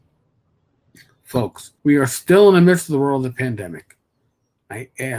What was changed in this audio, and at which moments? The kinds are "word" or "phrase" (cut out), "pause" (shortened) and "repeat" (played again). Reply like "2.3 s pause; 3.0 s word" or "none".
1.8 s pause